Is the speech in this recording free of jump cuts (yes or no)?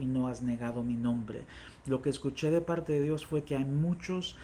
yes